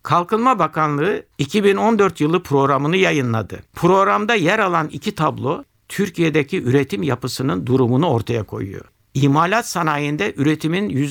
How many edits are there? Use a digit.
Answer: 1